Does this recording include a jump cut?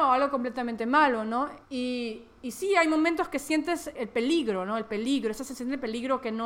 yes; 2 cuts; at 1.7 s, 4.0 s

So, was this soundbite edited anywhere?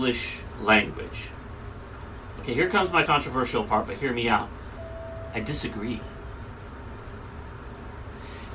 yes; 1 cut; at 3.1 s

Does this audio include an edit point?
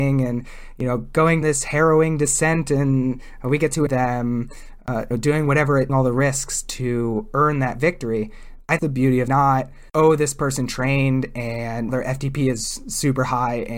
yes; 8 cuts; at 1.4 s, 3.9 s, 5.1 s, 5.9 s, 8.8 s, 9.3 s, 9.9 s, 11.9 s

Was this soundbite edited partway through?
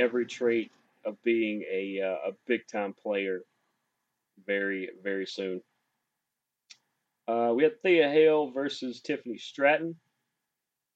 no; 0 cuts

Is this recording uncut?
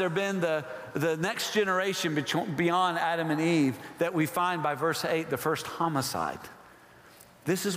yes; 0 cuts

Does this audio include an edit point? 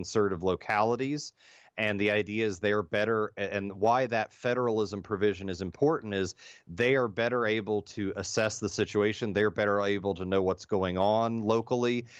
no; 0 cuts

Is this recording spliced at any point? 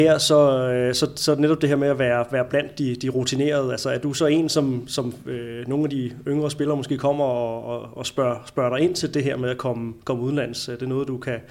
no; 0 cuts

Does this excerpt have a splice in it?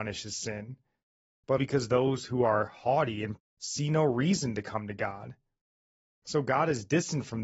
yes; 2 cuts; at 1.6 s, 3.4 s

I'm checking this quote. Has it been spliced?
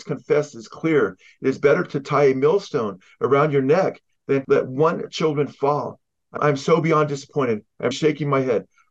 yes; 3 cuts; at 4.4 s, 6.4 s, 7.9 s

